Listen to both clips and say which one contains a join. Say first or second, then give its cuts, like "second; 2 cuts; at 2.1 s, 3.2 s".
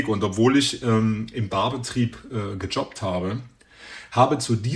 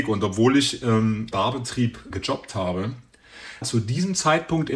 second; 3 cuts; at 1.3 s, 2.1 s, 3.6 s